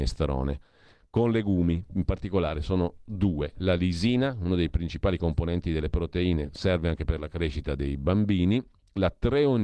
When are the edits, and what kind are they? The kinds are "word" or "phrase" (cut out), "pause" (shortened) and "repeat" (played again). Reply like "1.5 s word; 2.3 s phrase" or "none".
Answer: none